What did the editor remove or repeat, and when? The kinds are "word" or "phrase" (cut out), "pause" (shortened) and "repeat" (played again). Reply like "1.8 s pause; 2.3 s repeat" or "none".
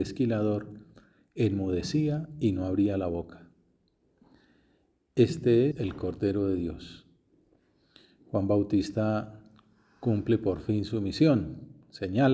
5.7 s word

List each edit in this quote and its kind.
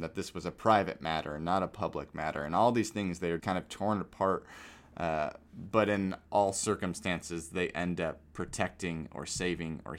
3.4 s word; 6.3 s pause

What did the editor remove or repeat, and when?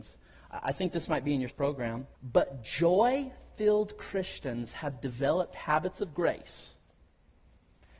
1.5 s word; 2.1 s pause

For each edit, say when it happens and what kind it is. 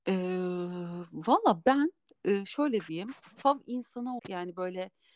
4.2 s word

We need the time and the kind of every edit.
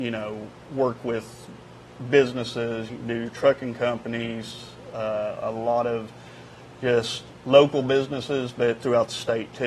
2.9 s phrase; 7.4 s pause

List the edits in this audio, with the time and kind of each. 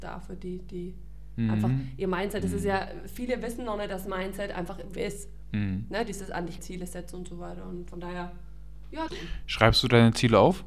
5.0 s phrase; 6.6 s phrase; 7.9 s word; 9.1 s phrase

